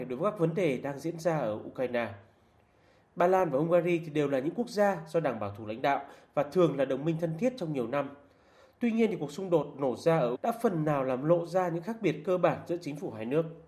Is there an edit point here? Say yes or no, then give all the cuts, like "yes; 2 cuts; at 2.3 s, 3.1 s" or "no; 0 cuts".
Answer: yes; 1 cut; at 10.4 s